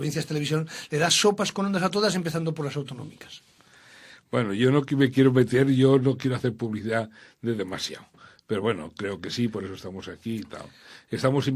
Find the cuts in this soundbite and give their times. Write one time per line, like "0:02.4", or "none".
none